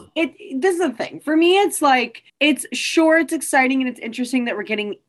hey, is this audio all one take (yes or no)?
no